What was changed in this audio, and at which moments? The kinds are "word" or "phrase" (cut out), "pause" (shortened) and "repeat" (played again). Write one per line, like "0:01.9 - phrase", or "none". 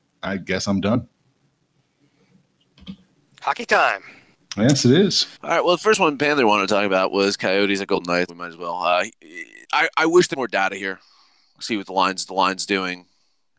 0:03.2 - pause
0:05.4 - pause
0:08.3 - word
0:09.6 - pause
0:10.3 - word
0:12.3 - repeat